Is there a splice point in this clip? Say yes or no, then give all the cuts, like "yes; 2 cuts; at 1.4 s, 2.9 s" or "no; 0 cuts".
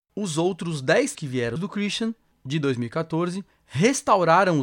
yes; 2 cuts; at 1.1 s, 1.6 s